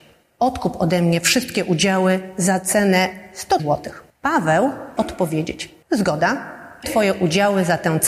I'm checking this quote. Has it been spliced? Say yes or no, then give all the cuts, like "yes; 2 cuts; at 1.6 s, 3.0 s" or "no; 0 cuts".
yes; 3 cuts; at 3.6 s, 5.0 s, 6.8 s